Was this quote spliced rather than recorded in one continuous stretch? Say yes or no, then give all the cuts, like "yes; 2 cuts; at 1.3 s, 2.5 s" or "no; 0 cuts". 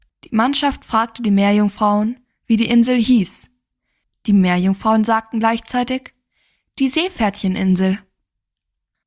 no; 0 cuts